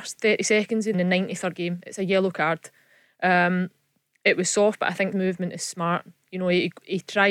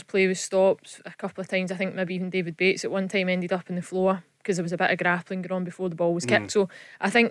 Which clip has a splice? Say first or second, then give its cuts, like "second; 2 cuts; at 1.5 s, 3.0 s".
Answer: first; 3 cuts; at 0.9 s, 1.6 s, 5.1 s